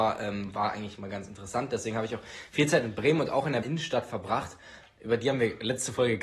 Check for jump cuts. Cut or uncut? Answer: cut